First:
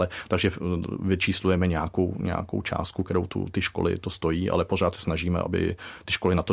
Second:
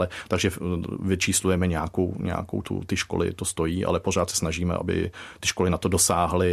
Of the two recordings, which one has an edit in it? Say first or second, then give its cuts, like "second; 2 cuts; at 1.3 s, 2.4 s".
second; 1 cut; at 2.6 s